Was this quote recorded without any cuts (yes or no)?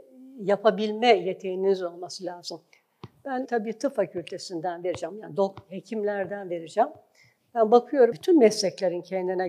no